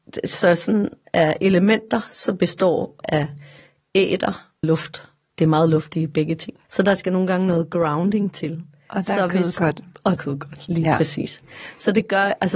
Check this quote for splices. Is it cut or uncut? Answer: cut